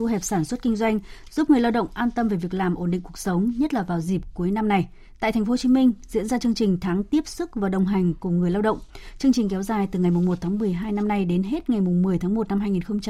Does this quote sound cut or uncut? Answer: uncut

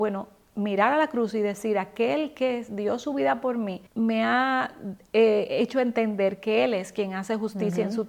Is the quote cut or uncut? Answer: cut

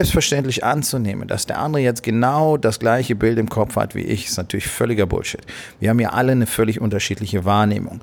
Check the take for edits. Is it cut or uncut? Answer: uncut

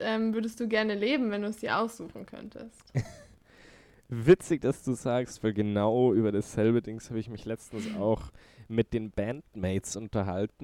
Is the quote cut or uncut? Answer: uncut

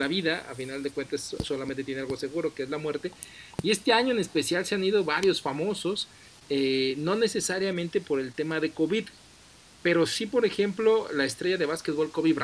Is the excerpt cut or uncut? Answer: uncut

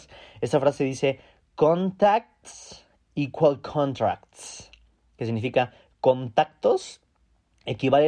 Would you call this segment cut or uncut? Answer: uncut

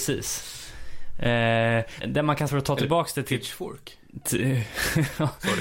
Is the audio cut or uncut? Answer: cut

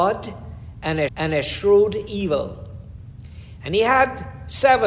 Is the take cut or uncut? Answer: cut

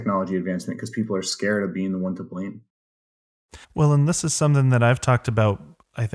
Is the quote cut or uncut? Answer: cut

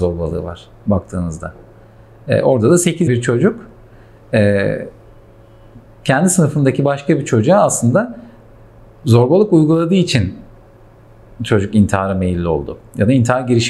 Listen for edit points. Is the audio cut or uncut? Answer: cut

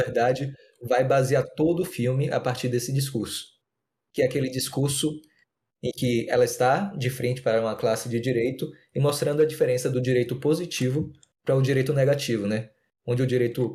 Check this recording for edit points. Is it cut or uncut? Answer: uncut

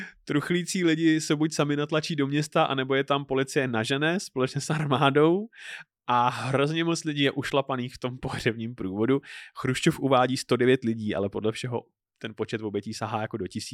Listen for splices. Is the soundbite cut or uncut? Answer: uncut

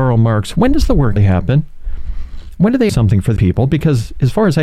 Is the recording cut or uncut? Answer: cut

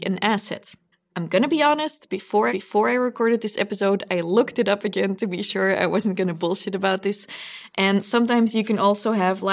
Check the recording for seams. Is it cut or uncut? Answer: cut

